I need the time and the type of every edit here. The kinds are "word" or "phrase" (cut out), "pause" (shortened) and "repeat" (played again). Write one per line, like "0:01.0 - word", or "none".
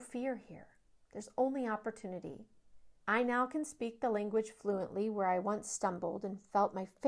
0:01.0 - pause
0:03.0 - pause